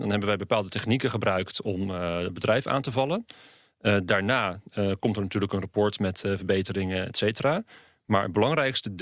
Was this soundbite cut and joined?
no; 0 cuts

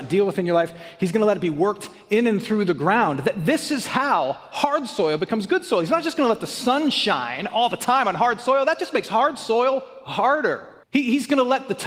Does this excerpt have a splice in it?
yes; 1 cut; at 10.8 s

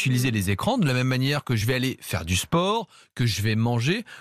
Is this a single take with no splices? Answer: yes; 0 cuts

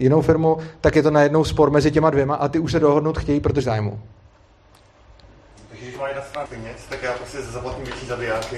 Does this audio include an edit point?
yes; 2 cuts; at 3.6 s, 6.5 s

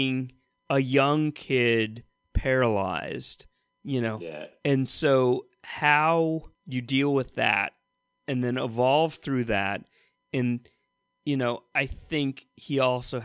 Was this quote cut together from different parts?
yes; 1 cut; at 6.5 s

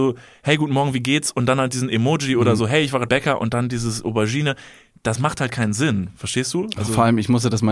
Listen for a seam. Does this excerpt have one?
yes; 1 cut; at 3.1 s

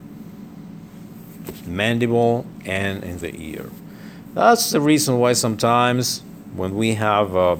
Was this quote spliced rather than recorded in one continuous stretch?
yes; 1 cut; at 3.2 s

